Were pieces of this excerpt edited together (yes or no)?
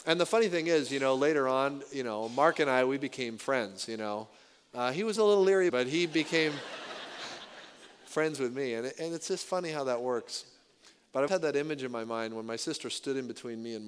yes